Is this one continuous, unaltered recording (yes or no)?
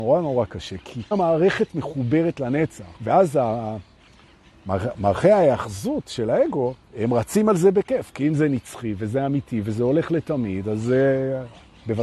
no